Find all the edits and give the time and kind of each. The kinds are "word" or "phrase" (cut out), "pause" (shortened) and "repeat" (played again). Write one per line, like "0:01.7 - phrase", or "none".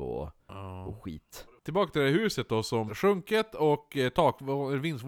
0:02.9 - phrase